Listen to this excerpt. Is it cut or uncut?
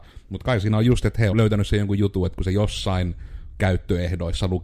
cut